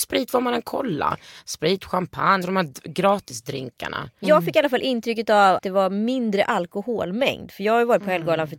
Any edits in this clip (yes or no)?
yes